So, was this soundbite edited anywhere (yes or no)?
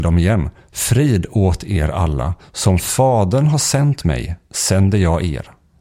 no